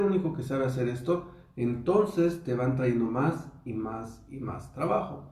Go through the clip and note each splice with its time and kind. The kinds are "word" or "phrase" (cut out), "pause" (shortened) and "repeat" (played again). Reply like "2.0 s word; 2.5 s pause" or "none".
none